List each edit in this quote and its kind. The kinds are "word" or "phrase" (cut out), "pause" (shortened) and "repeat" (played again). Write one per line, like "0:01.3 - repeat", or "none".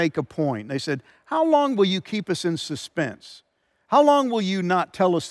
none